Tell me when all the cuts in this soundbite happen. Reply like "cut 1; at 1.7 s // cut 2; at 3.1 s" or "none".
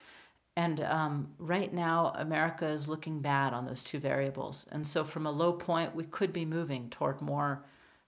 none